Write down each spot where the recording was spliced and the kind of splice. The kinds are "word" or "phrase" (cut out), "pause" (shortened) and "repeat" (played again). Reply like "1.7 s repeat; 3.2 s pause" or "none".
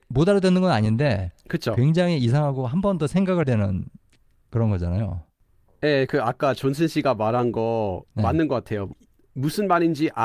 3.4 s word; 6.1 s word